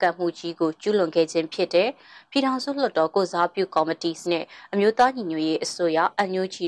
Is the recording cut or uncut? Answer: cut